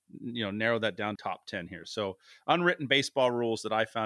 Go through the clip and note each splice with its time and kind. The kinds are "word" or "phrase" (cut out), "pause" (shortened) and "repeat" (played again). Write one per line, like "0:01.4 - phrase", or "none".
0:01.1 - phrase